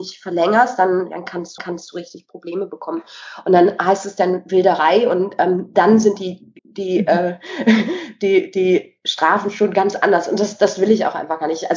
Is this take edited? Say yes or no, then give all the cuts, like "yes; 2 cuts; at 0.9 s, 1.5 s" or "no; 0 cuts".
yes; 2 cuts; at 1.6 s, 6.6 s